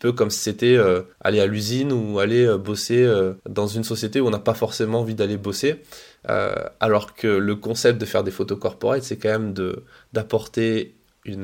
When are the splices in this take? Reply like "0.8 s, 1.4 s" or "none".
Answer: 1.1 s, 3.4 s

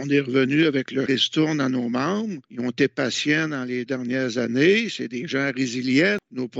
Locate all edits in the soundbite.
1.1 s, 2.4 s, 3.9 s

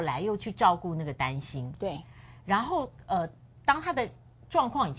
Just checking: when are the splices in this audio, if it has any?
none

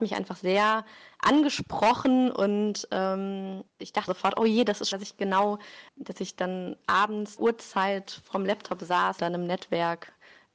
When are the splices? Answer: 3.7 s, 4.1 s, 4.9 s, 5.9 s, 7.4 s, 9.2 s

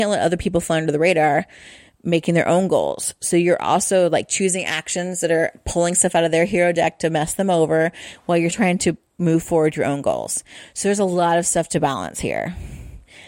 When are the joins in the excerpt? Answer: 8.5 s

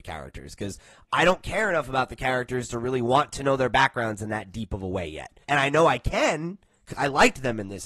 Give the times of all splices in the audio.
5.4 s, 6.9 s

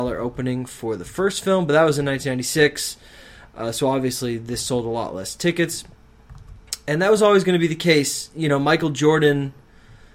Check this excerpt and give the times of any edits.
none

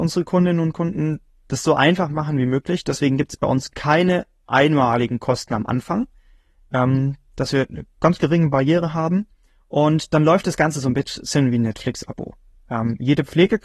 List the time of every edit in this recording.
none

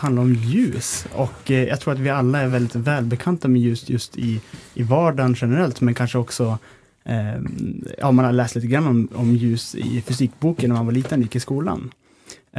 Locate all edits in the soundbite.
none

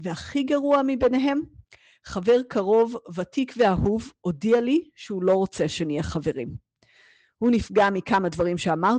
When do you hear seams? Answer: none

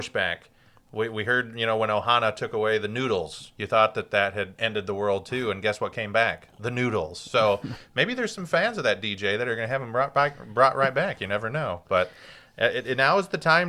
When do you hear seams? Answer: none

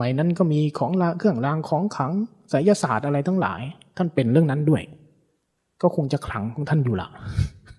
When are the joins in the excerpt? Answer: none

